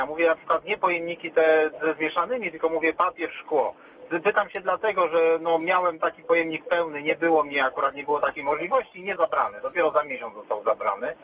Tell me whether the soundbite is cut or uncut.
cut